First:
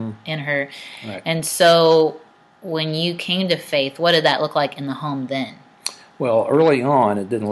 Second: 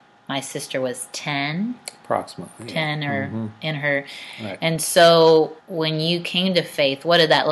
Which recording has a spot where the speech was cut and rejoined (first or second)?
second